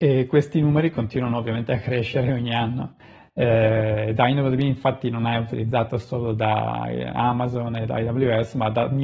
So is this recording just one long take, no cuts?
yes; 0 cuts

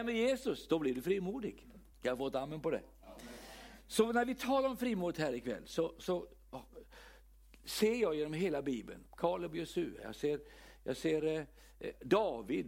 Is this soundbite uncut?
no; 1 cut; at 1.9 s

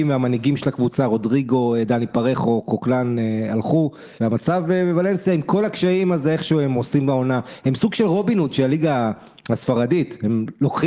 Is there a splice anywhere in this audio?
yes; 1 cut; at 4.2 s

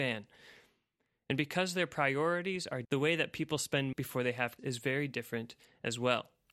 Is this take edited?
yes; 3 cuts; at 2.8 s, 3.9 s, 4.6 s

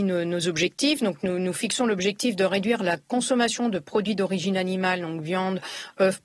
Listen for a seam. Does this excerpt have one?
no; 0 cuts

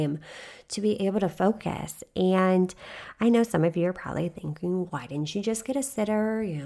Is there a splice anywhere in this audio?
yes; 1 cut; at 4.9 s

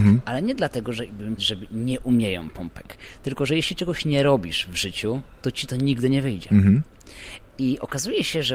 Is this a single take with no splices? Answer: no; 1 cut; at 1.4 s

